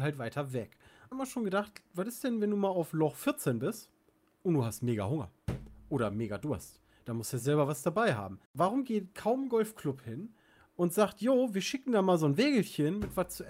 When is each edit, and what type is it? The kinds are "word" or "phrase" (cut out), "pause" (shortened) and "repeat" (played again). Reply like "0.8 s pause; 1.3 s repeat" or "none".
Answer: 1.1 s phrase; 8.4 s pause